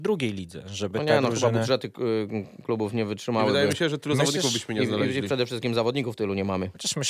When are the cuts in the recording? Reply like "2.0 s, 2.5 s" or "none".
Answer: none